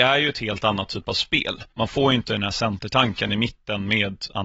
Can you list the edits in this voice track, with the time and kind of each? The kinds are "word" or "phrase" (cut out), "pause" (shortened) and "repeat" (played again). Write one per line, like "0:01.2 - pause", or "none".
0:01.7 - pause